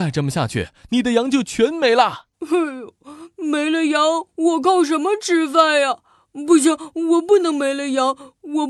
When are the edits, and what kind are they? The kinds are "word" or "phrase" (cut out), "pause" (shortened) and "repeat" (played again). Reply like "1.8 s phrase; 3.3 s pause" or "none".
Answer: 2.3 s pause